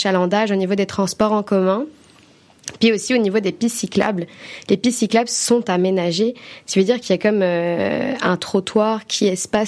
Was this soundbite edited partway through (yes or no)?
no